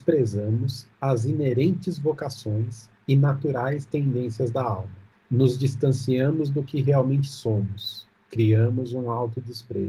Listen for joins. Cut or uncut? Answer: cut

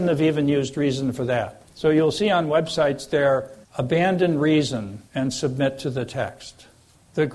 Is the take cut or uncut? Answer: cut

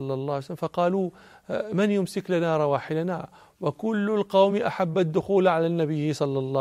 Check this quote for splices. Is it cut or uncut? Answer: uncut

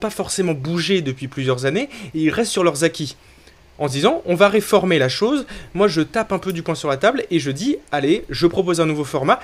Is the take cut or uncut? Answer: uncut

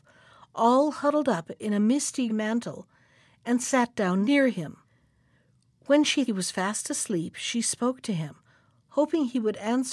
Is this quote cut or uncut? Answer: cut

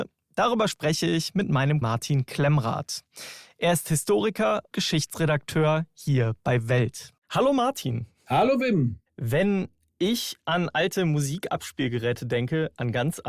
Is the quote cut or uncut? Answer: cut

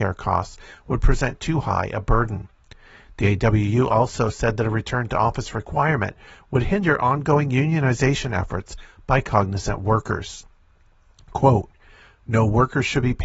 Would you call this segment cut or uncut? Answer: uncut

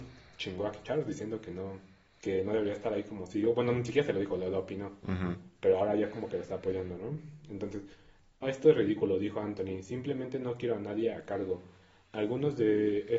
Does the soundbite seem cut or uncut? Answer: cut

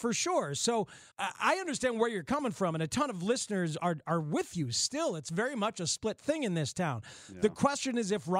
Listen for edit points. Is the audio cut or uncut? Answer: cut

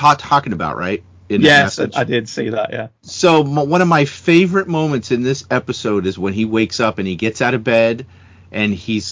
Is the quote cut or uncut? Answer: uncut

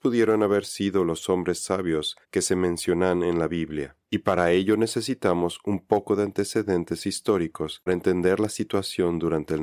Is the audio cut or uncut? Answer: cut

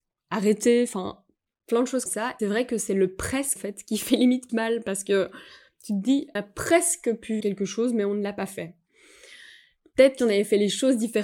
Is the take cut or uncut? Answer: cut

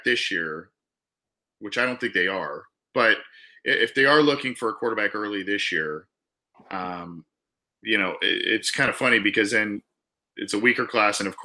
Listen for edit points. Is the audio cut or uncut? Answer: uncut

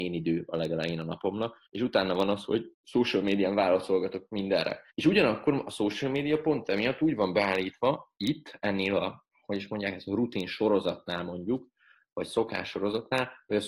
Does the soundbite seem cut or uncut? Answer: cut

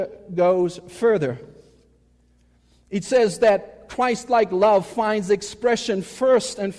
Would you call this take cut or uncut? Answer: uncut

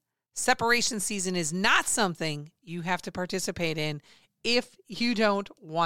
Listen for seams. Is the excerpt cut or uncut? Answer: uncut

